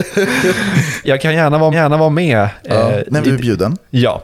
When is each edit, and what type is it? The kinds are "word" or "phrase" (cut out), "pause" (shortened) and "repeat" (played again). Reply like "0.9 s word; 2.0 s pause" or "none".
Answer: 1.0 s word; 1.7 s repeat; 3.2 s phrase